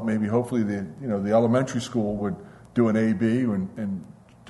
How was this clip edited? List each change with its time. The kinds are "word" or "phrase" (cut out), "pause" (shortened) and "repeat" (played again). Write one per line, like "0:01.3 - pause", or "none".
none